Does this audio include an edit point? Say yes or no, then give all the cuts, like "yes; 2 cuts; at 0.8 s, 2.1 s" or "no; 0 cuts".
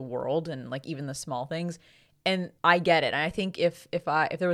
yes; 1 cut; at 2.6 s